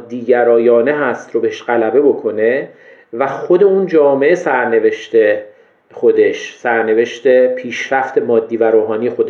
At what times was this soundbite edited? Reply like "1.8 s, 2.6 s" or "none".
none

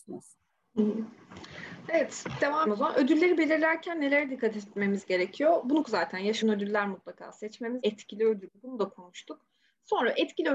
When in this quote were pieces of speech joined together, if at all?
2.7 s, 5.8 s, 6.4 s, 7.8 s

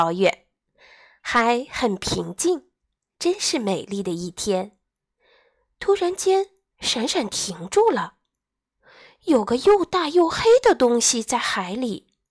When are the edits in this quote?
none

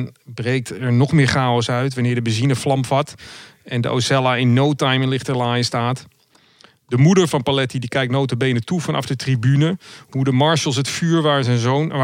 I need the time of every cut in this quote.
none

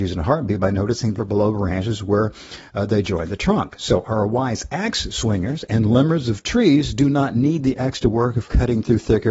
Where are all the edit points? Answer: 1.2 s

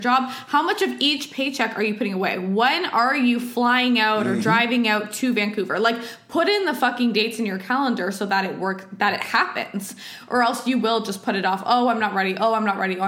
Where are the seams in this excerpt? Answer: none

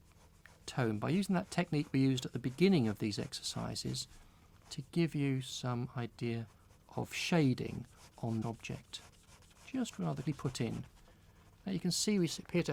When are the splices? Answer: 8.4 s, 10.2 s

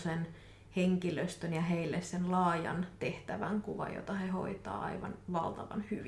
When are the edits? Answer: none

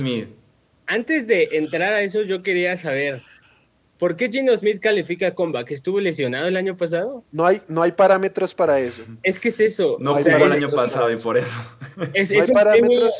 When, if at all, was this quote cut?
none

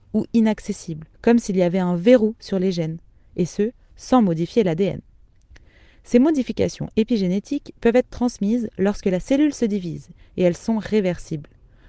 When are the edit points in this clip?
1.1 s

